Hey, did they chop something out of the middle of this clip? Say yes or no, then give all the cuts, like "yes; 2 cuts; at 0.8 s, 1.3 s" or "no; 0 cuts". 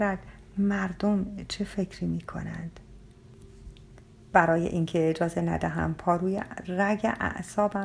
no; 0 cuts